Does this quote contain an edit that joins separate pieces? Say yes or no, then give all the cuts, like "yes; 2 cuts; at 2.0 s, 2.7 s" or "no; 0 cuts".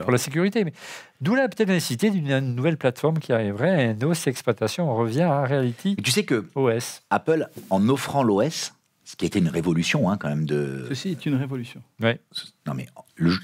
no; 0 cuts